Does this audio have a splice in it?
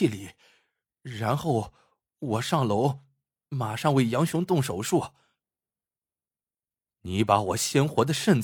no; 0 cuts

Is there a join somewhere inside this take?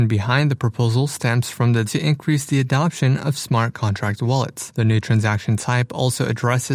yes; 1 cut; at 1.9 s

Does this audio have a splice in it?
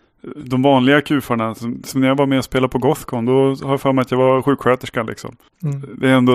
no; 0 cuts

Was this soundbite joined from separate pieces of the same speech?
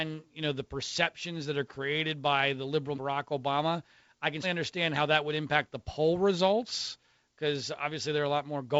yes; 2 cuts; at 2.9 s, 4.4 s

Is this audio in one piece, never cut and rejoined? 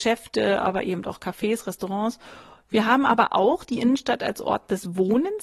yes; 0 cuts

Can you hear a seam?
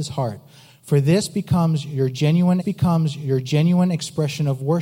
yes; 1 cut; at 2.6 s

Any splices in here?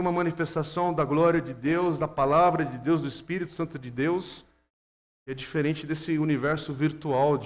no; 0 cuts

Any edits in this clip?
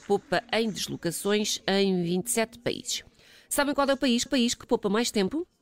yes; 1 cut; at 4.3 s

